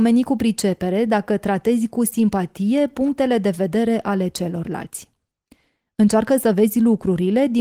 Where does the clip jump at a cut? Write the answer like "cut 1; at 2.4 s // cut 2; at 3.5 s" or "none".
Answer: none